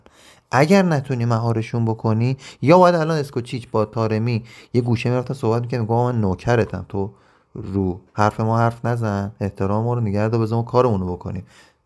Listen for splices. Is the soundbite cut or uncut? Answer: uncut